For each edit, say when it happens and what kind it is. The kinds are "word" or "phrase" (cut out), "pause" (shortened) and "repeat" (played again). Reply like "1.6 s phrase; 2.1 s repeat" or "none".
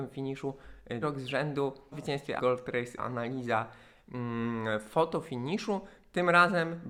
1.0 s word; 1.9 s word; 2.4 s word; 3.0 s word